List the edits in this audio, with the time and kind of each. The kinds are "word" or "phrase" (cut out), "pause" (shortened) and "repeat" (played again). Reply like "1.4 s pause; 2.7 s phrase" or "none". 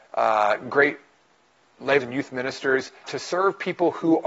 2.0 s word; 3.0 s word